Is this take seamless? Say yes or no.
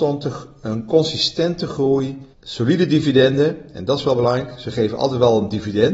no